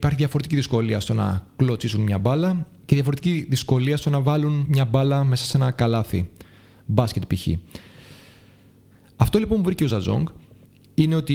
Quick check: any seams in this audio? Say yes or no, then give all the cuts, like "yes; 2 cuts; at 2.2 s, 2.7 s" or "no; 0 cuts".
no; 0 cuts